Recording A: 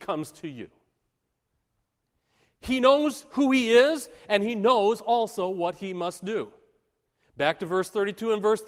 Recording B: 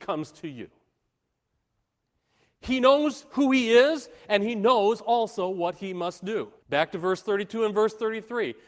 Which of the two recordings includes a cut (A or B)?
B